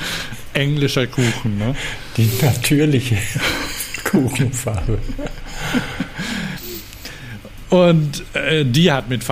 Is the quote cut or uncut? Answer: uncut